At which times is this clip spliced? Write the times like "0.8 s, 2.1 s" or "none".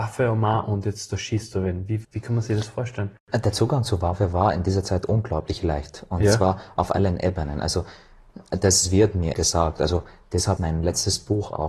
2.0 s, 9.3 s, 10.6 s

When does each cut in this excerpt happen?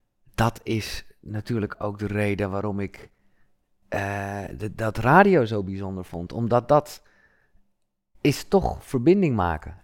none

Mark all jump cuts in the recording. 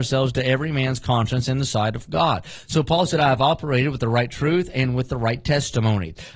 none

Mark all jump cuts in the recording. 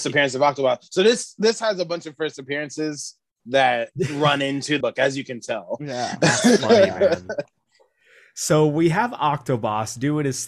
4.8 s

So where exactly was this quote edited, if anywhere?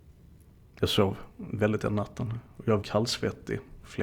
1.8 s, 2.8 s

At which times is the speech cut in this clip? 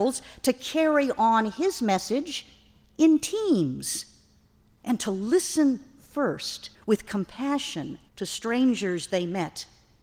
6.7 s, 8.1 s

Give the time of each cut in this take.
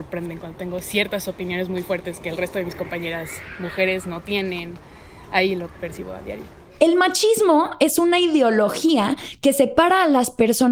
none

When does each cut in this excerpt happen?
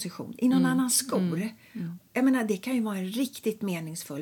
none

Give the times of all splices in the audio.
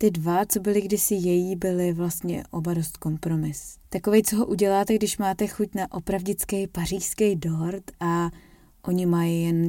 3.8 s

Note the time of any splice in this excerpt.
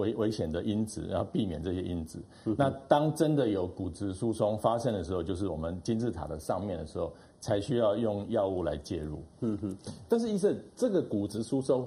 none

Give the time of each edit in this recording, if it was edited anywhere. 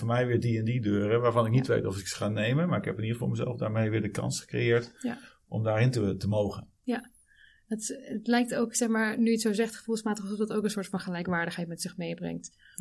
none

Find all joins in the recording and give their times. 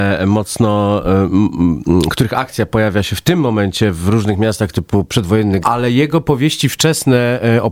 4.7 s, 5.6 s

